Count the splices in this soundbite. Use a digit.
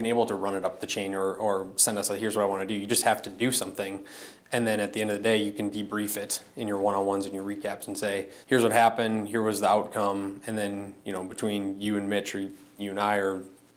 1